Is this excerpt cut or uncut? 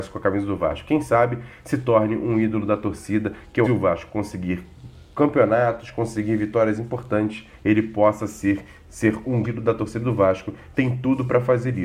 cut